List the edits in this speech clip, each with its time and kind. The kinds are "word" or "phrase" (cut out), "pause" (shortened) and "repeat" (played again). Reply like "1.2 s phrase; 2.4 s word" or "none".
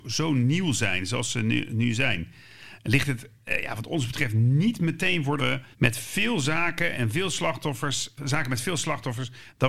5.4 s phrase; 5.7 s pause; 8.2 s word